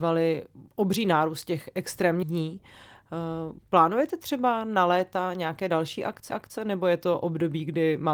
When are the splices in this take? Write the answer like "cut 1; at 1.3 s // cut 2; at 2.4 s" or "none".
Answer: cut 1; at 2.2 s // cut 2; at 3.6 s // cut 3; at 6.3 s

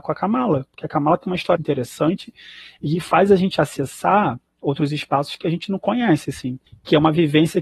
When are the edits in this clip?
cut 1; at 1.6 s

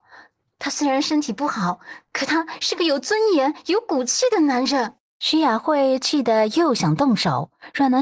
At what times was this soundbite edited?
cut 1; at 5.1 s

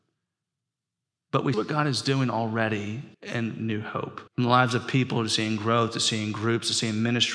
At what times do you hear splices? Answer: cut 1; at 1.5 s // cut 2; at 3.1 s // cut 3; at 4.3 s

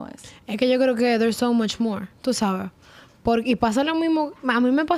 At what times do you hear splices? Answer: none

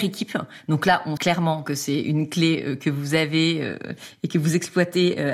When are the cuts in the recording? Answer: cut 1; at 1.2 s

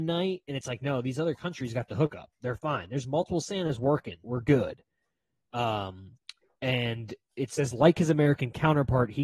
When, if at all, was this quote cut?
cut 1; at 4.2 s

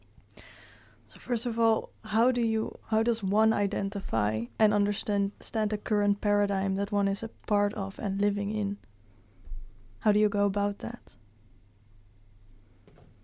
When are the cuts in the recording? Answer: cut 1; at 2.8 s

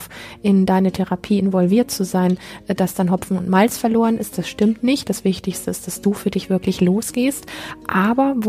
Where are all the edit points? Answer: none

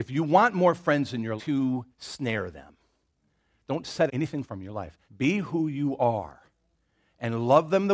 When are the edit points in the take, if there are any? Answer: cut 1; at 1.4 s // cut 2; at 1.9 s // cut 3; at 4.1 s // cut 4; at 4.4 s // cut 5; at 5.0 s

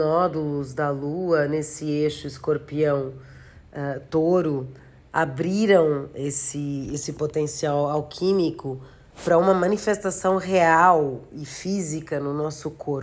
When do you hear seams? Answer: none

